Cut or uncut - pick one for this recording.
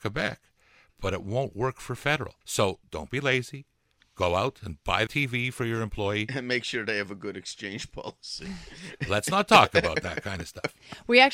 cut